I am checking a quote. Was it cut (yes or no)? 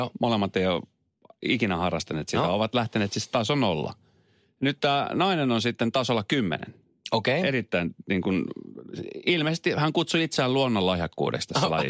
no